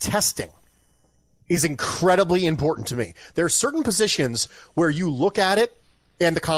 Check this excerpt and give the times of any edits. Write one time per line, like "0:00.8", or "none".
none